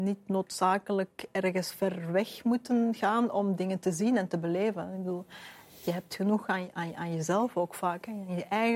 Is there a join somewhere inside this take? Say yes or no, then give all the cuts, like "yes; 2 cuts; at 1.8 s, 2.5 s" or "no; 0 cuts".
no; 0 cuts